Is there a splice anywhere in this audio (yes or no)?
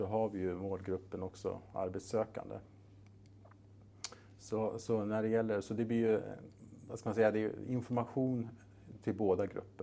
no